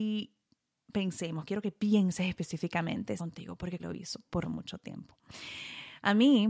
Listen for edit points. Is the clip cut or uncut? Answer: cut